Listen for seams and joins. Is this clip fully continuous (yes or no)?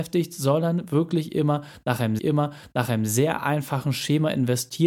no